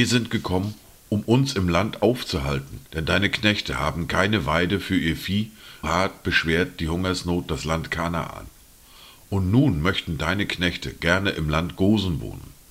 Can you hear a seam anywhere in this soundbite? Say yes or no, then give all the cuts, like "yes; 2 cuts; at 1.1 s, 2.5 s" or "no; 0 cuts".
yes; 2 cuts; at 2.9 s, 5.8 s